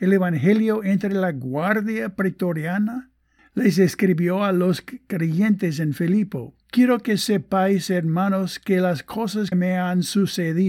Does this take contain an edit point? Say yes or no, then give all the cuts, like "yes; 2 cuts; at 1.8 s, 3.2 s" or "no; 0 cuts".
yes; 2 cuts; at 6.6 s, 9.5 s